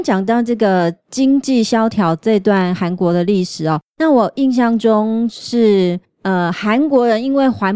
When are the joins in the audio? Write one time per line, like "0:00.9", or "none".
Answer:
0:01.0

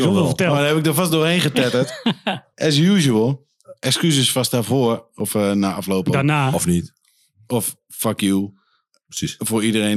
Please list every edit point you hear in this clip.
none

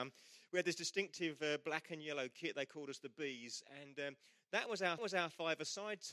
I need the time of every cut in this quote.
0:05.0

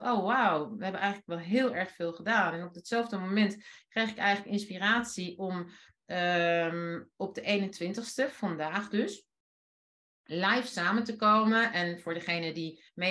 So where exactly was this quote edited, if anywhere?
none

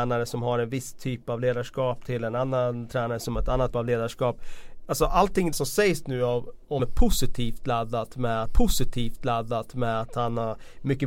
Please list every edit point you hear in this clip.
0:03.7
0:05.5
0:06.8
0:08.5

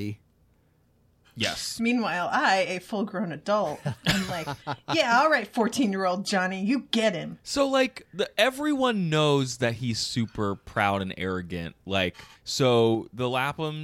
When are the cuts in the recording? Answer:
0:12.4

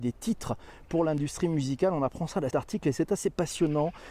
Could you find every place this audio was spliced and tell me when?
0:02.5

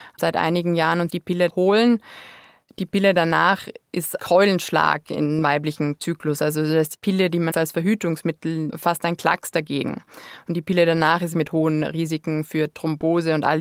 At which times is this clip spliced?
0:01.1
0:01.5
0:04.2
0:05.4
0:06.9
0:07.5
0:08.7
0:11.3

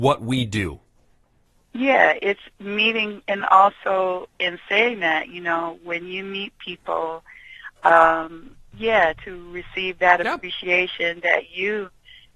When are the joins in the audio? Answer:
none

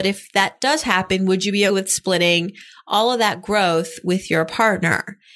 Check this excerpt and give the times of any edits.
0:01.7

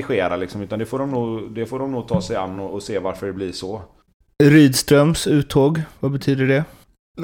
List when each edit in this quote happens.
none

